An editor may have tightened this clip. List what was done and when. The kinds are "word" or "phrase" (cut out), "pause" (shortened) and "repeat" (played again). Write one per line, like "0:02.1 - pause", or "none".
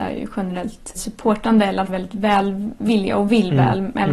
0:00.9 - word
0:01.9 - word